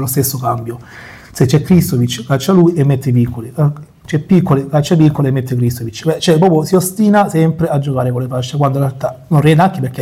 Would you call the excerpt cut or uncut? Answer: uncut